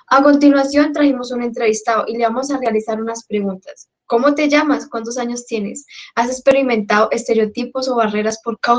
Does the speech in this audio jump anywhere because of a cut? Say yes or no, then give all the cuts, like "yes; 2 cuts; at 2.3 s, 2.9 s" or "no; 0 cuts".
yes; 1 cut; at 3.9 s